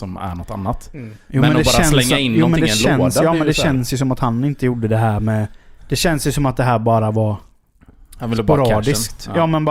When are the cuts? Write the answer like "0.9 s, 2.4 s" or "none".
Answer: 5.8 s